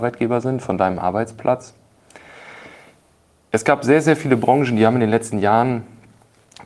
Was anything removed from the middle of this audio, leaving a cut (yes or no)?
no